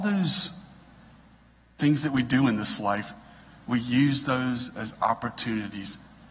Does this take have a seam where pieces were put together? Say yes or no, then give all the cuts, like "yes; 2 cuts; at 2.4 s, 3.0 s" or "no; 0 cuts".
no; 0 cuts